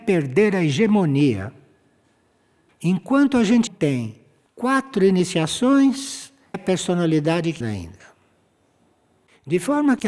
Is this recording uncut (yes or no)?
no